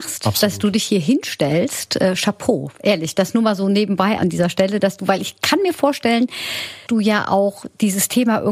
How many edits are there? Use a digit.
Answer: 2